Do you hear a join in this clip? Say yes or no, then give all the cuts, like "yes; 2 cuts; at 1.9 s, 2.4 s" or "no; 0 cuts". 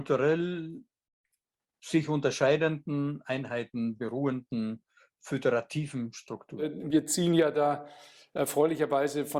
no; 0 cuts